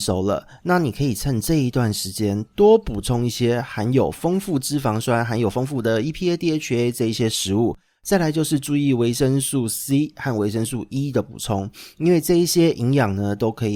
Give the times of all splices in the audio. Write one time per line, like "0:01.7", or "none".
none